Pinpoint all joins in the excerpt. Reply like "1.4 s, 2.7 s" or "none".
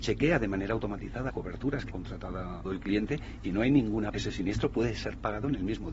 1.3 s, 1.9 s, 2.6 s, 3.4 s, 4.1 s